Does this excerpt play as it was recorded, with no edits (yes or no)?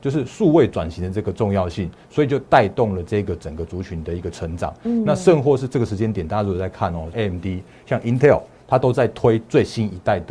no